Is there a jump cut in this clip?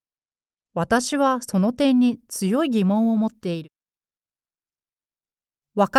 no; 0 cuts

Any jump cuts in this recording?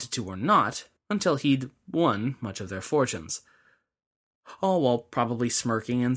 yes; 1 cut; at 1.0 s

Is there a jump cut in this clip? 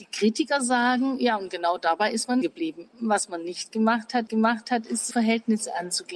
yes; 3 cuts; at 2.4 s, 4.3 s, 5.1 s

